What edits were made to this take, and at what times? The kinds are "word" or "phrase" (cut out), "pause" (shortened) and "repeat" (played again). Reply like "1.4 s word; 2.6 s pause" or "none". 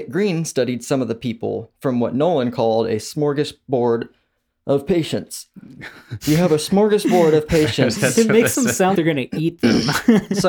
9.0 s word